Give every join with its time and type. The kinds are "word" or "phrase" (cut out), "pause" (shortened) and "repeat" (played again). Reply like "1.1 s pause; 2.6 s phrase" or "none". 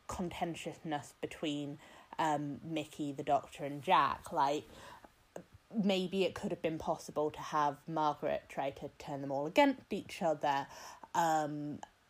none